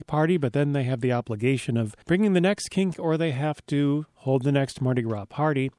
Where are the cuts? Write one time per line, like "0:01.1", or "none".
0:02.0
0:02.9